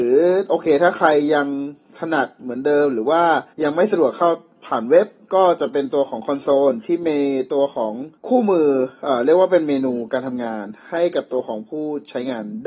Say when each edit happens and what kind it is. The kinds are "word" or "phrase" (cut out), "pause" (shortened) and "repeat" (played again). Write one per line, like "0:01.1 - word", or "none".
0:03.5 - pause
0:08.2 - pause